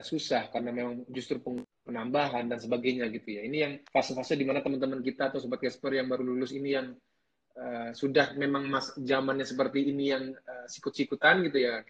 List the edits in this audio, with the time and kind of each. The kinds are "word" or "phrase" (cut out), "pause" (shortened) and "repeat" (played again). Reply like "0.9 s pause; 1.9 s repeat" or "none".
1.7 s pause; 3.9 s pause

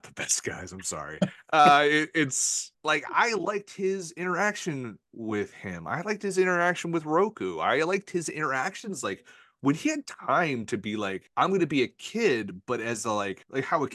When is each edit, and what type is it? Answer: none

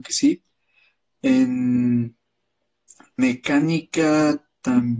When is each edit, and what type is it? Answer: 3.2 s word

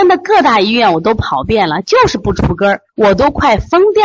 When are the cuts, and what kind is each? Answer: 2.9 s pause

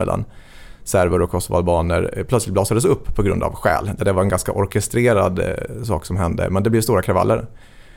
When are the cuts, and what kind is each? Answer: none

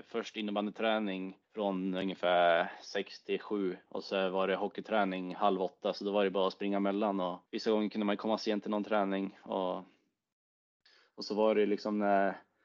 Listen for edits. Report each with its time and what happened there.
1.4 s pause; 7.5 s pause

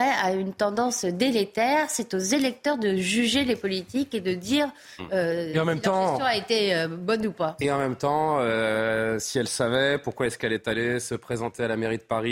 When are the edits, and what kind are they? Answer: none

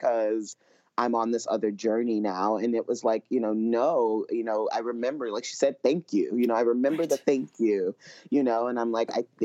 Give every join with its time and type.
none

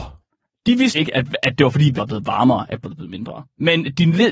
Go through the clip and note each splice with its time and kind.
0.9 s word; 2.0 s word; 2.8 s word

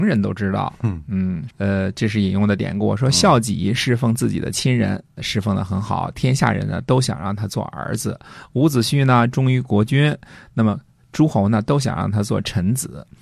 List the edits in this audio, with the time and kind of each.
1.5 s word; 5.2 s word

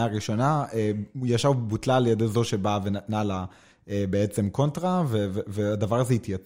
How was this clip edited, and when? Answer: none

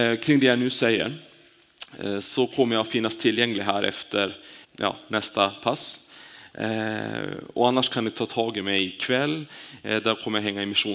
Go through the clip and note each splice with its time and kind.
4.6 s pause

